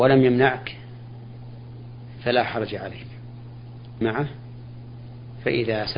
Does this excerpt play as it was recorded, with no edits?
no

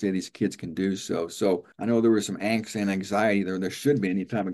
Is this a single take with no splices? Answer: no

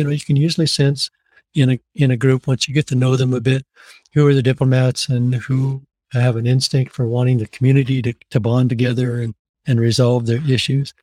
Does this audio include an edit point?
no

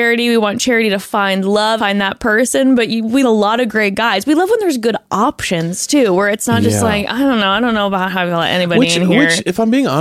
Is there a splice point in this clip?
yes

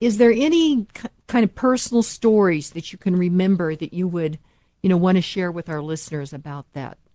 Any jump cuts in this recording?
no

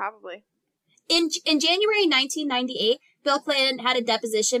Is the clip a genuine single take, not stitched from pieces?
yes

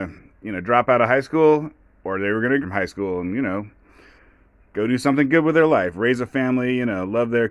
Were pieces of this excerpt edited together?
yes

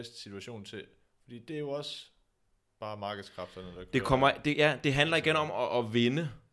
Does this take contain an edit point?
no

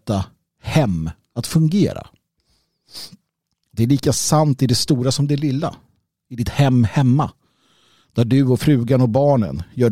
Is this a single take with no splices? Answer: yes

